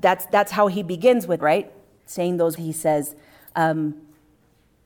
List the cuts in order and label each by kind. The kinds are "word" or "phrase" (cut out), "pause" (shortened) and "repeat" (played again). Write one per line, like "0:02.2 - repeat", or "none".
0:01.4 - word
0:02.6 - word